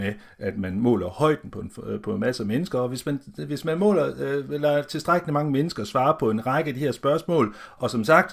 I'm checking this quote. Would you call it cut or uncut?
uncut